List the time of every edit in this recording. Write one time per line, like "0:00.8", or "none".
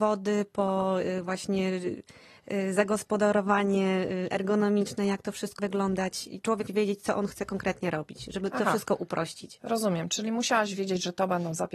0:05.6
0:06.7